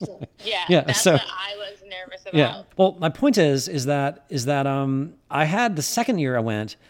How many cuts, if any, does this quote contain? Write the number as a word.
two